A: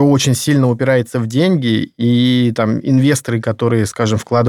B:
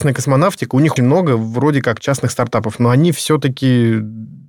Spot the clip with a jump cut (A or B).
B